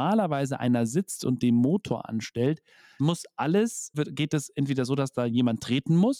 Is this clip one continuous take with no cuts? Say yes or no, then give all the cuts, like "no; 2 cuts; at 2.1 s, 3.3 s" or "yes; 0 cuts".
no; 2 cuts; at 3.0 s, 3.9 s